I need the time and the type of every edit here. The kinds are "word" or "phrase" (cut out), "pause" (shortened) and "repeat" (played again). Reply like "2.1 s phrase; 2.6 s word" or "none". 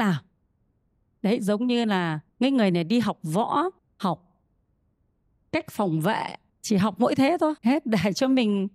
2.3 s pause; 3.8 s pause; 6.5 s pause; 7.6 s pause